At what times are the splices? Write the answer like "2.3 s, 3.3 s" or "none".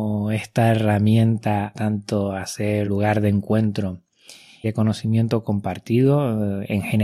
1.7 s, 2.9 s, 4.6 s